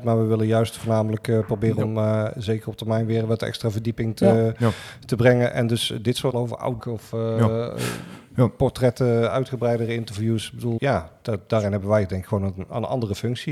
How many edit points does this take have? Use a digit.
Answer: 3